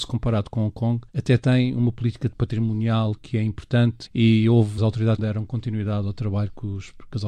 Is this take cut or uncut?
cut